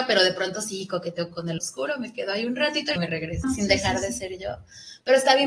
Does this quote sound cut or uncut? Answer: cut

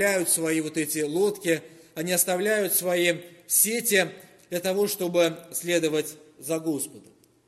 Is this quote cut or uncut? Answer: uncut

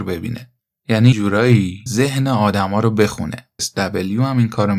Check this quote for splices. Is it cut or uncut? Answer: cut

